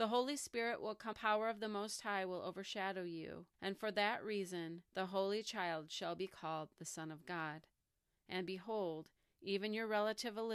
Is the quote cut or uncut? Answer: cut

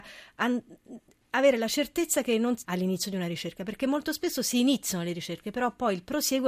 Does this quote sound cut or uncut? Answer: cut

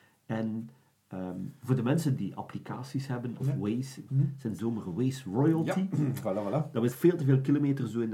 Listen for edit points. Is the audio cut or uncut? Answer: cut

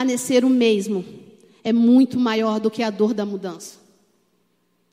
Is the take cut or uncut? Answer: uncut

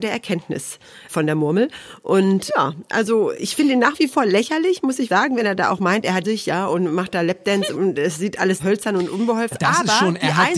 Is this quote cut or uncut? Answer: cut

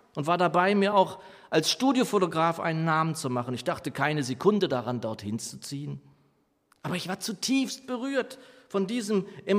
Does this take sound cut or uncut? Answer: uncut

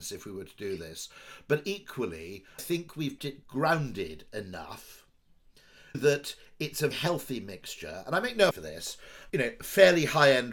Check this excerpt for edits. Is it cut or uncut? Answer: cut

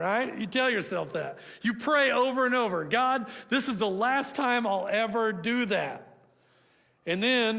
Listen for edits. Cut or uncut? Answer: uncut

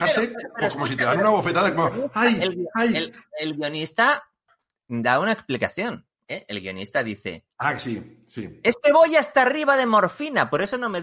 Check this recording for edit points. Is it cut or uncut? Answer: uncut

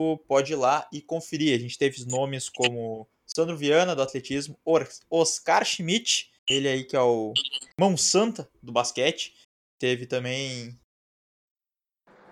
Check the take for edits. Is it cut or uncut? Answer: cut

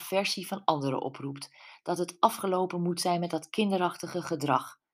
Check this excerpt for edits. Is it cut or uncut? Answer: uncut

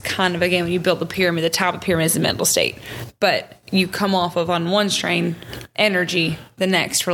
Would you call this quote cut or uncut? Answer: uncut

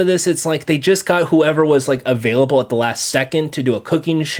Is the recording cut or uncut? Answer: uncut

